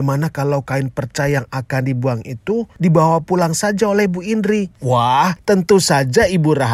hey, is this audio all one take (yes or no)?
yes